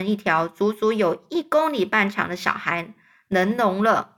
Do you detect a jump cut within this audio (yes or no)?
no